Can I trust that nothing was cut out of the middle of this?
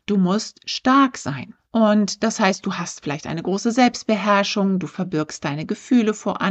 no; 1 cut; at 1.6 s

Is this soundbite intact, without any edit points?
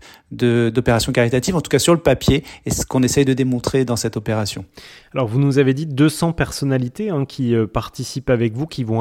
yes; 0 cuts

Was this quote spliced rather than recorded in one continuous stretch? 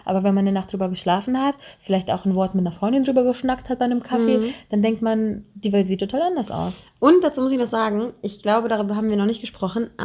no; 0 cuts

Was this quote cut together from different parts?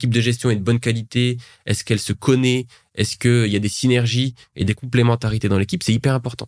no; 0 cuts

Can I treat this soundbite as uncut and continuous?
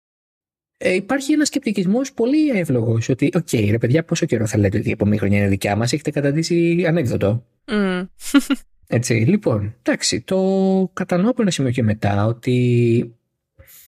no; 2 cuts; at 7.6 s, 8.8 s

